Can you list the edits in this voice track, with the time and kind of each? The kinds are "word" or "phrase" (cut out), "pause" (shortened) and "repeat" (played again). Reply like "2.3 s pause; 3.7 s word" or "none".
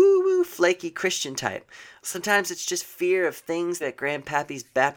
3.8 s phrase

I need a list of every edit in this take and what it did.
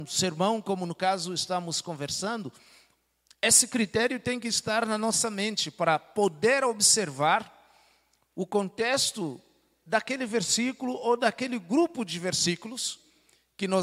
none

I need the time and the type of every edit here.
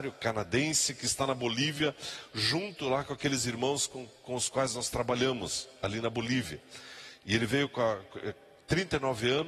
none

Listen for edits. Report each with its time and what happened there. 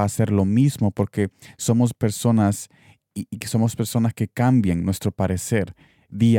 none

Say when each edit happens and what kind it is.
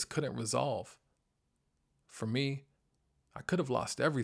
none

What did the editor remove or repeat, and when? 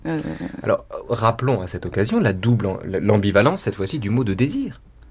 none

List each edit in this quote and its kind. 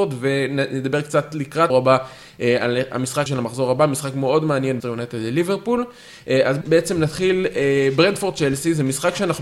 1.7 s word; 3.3 s word; 4.8 s word; 6.6 s word

